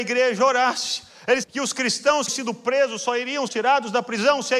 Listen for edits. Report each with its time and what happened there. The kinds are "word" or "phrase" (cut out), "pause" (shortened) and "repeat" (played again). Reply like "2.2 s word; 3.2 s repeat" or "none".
1.4 s word; 2.3 s word; 3.5 s word